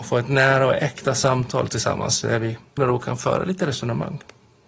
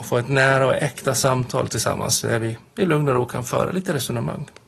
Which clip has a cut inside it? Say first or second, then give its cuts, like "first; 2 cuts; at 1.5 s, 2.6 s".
first; 1 cut; at 2.8 s